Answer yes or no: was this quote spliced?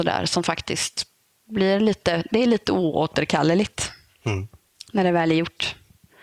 no